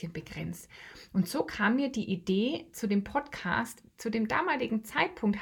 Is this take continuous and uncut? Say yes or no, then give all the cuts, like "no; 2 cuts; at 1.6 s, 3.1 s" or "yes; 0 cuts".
yes; 0 cuts